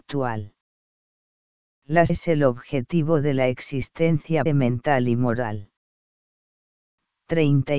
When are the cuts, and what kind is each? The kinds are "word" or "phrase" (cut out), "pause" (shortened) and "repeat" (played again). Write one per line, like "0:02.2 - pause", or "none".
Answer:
0:02.1 - word
0:04.5 - word